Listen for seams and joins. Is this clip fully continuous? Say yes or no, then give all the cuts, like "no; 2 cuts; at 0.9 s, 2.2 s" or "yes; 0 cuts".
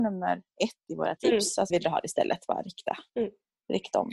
no; 3 cuts; at 1.2 s, 1.7 s, 3.1 s